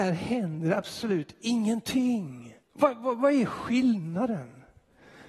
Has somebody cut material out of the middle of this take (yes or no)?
yes